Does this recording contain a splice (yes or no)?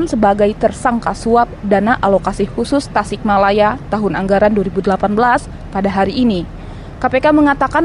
no